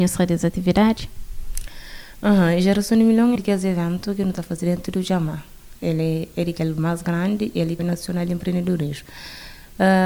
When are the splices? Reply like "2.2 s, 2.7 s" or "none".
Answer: 3.4 s, 7.8 s